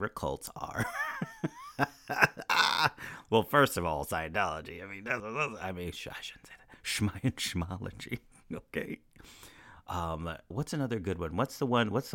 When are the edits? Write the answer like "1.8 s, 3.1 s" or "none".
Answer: 5.2 s, 10.5 s

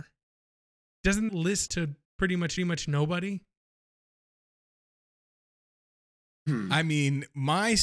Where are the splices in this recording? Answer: 1.3 s, 1.7 s, 2.0 s, 2.6 s

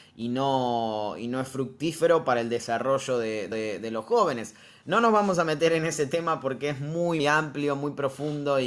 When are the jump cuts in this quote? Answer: 3.5 s, 7.2 s

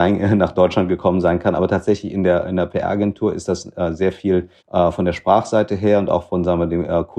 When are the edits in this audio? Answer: 4.6 s

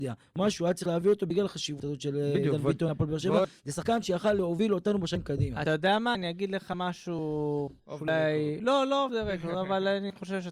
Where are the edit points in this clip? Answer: 7.8 s

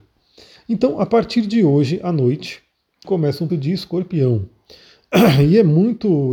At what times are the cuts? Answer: 3.0 s, 3.5 s

